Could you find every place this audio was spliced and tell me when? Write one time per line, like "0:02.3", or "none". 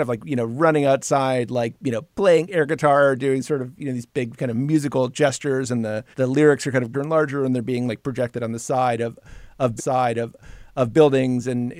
0:01.8
0:02.1
0:04.3
0:06.1
0:06.9
0:09.8